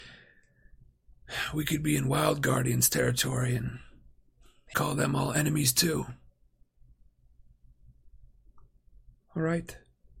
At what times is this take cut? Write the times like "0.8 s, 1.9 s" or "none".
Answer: 4.7 s